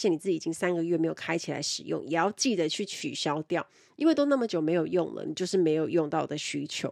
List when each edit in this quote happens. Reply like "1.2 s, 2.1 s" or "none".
none